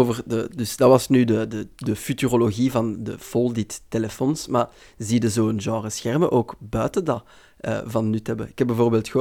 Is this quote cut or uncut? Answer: uncut